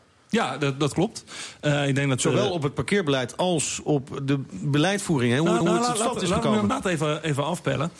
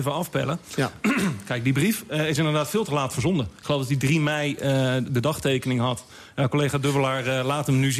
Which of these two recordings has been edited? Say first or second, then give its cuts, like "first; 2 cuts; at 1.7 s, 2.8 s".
first; 1 cut; at 5.6 s